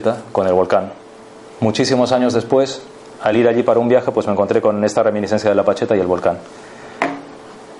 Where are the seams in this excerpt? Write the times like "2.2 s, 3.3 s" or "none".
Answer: none